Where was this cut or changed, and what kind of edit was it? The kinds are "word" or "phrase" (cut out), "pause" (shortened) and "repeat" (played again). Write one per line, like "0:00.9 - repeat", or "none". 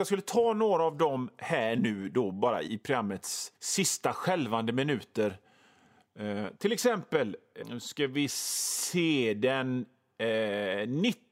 0:02.7 - word
0:03.6 - pause
0:07.6 - word